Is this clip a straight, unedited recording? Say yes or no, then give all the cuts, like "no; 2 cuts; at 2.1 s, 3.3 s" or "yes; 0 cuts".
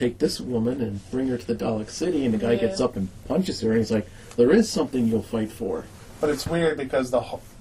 no; 1 cut; at 4.4 s